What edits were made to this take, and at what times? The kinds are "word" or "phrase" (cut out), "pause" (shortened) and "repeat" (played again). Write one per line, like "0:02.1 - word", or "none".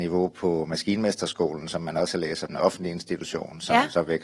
0:02.5 - phrase